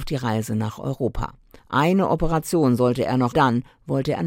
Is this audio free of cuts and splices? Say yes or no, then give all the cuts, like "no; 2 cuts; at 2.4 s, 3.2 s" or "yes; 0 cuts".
no; 2 cuts; at 1.6 s, 3.3 s